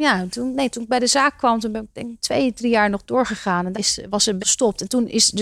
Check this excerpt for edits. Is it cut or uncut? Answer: cut